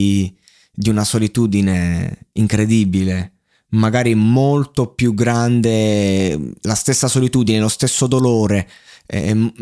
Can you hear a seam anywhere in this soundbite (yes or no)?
no